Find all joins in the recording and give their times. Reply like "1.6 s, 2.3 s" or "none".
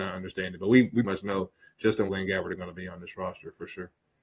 1.0 s, 2.1 s